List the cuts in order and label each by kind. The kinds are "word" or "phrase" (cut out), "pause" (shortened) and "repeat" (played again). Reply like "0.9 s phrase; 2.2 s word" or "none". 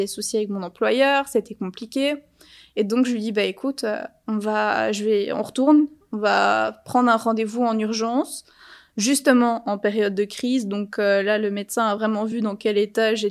none